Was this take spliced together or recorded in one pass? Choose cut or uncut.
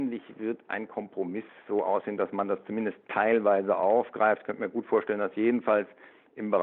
uncut